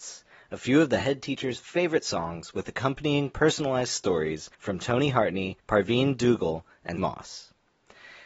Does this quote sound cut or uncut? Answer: cut